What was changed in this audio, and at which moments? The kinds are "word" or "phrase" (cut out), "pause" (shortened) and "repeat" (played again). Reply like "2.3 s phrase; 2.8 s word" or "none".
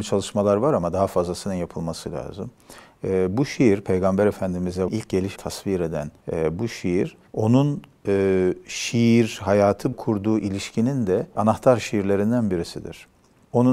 4.9 s word; 5.4 s word; 6.2 s pause; 7.3 s pause; 9.9 s phrase; 11.4 s word